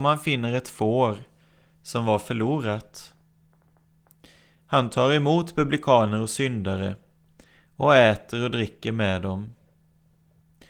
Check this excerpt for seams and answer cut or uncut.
uncut